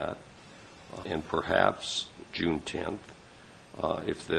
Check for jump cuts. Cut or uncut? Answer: cut